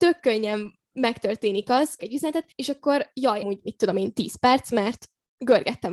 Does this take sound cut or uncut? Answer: cut